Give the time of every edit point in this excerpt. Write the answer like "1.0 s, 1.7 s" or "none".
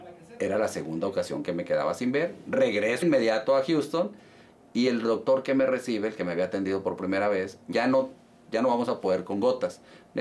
3.0 s, 7.7 s